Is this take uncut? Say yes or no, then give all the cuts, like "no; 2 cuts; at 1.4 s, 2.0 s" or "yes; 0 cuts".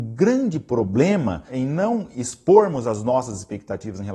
yes; 0 cuts